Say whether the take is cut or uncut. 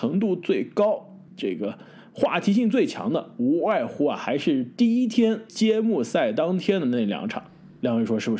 cut